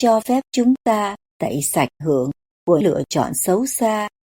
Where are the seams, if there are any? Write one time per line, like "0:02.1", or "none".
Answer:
0:02.0
0:02.8